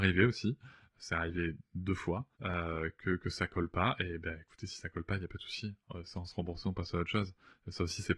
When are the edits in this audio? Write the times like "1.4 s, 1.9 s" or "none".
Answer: 2.3 s

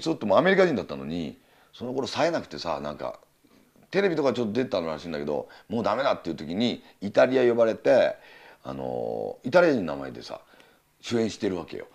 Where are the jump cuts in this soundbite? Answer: none

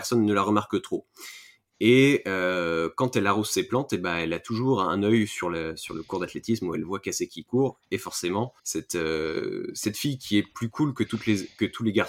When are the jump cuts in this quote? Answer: 8.6 s

